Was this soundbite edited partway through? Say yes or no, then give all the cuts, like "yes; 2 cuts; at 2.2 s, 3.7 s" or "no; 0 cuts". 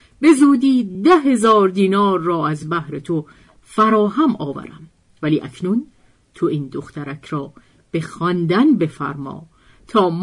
no; 0 cuts